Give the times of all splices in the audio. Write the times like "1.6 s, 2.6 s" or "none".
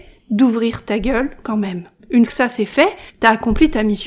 2.3 s, 3.1 s